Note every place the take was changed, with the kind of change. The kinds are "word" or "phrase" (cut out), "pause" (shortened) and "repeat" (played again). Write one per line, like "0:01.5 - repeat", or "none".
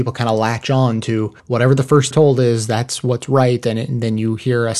0:01.4 - pause
0:02.1 - phrase

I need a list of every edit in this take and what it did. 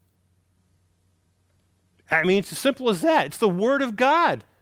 none

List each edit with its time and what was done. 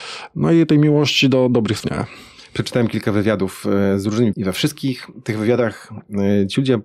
0:01.8 - word
0:04.3 - word

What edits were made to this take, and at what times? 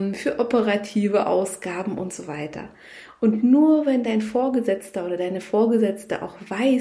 none

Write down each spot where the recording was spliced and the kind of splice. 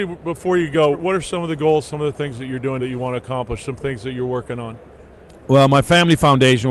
0:00.9 - word
0:02.8 - word

